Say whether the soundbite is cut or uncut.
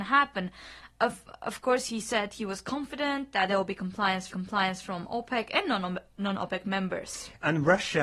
cut